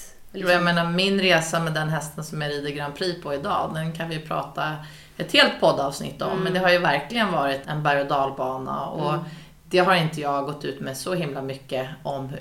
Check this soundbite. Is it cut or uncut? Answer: cut